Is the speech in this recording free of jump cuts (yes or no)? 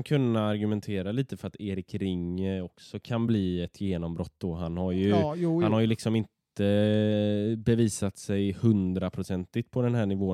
yes